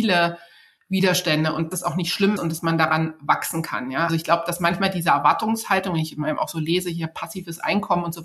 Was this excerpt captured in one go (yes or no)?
no